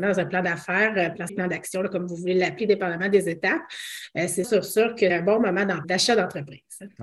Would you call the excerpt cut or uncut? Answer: cut